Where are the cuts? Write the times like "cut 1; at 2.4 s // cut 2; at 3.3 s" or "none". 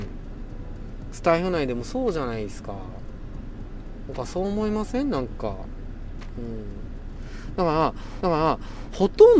cut 1; at 8.2 s